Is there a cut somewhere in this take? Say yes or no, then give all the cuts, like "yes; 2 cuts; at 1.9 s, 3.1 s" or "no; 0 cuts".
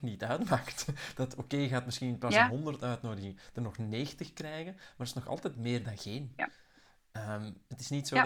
no; 0 cuts